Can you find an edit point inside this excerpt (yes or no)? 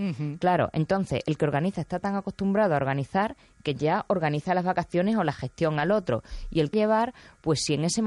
yes